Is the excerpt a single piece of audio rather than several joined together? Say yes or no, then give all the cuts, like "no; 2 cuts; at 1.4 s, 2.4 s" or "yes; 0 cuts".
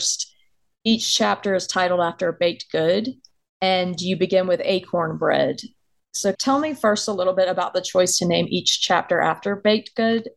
no; 2 cuts; at 3.4 s, 6.3 s